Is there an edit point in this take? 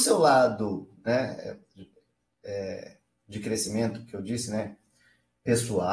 no; 0 cuts

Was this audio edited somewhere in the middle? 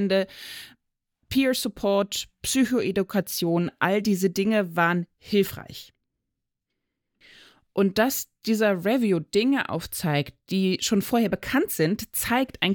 no; 0 cuts

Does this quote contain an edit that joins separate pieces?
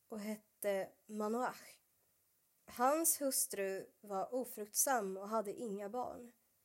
no; 0 cuts

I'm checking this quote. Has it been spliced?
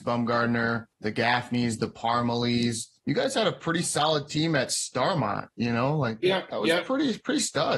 yes; 1 cut; at 0.9 s

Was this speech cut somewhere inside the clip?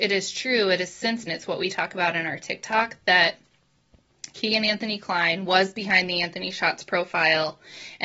yes; 1 cut; at 1.3 s

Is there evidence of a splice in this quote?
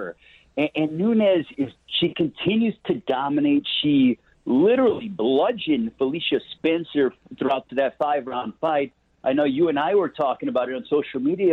yes; 2 cuts; at 1.8 s, 7.7 s

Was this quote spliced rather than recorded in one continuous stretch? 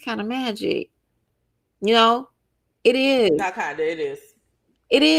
no; 0 cuts

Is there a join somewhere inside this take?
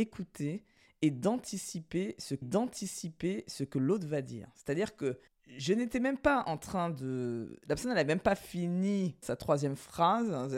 yes; 3 cuts; at 2.4 s, 5.3 s, 9.2 s

